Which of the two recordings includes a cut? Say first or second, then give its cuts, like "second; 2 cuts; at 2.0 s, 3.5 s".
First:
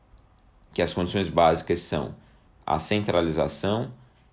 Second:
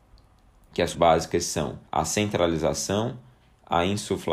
second; 2 cuts; at 0.9 s, 1.9 s